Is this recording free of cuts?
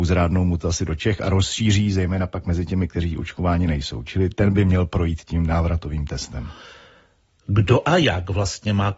yes; 0 cuts

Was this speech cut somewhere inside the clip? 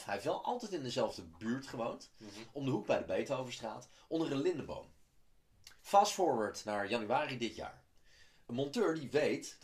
yes; 1 cut; at 5.8 s

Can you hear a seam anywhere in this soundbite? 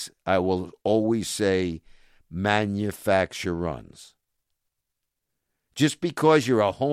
no; 0 cuts

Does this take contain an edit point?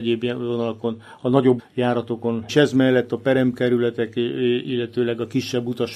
yes; 2 cuts; at 1.6 s, 2.5 s

